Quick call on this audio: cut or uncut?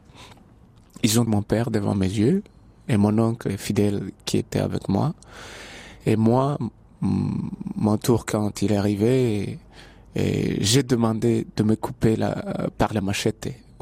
cut